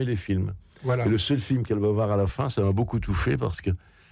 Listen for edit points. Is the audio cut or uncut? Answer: uncut